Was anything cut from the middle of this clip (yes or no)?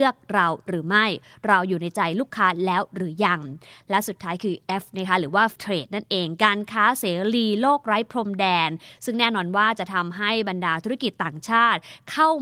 yes